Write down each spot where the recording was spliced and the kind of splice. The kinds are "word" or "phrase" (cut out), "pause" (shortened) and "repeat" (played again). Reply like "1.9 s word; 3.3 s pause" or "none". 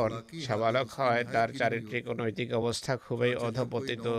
none